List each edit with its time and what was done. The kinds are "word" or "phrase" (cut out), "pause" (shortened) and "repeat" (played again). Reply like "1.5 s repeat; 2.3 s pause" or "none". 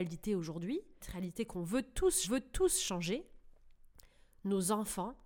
1.0 s word; 2.2 s repeat